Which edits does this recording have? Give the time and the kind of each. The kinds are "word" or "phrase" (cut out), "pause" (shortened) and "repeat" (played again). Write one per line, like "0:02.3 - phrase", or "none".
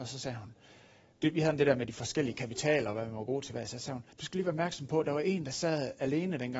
0:04.1 - pause